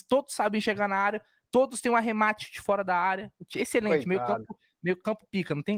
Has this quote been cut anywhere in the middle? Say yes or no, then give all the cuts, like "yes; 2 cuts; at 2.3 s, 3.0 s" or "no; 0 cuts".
no; 0 cuts